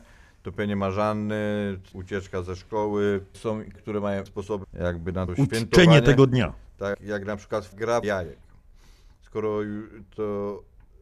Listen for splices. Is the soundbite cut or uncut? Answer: cut